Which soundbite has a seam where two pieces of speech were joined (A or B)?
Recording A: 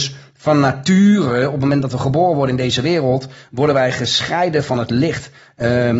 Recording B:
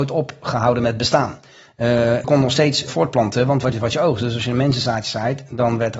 B